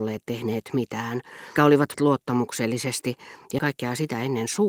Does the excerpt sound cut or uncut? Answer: cut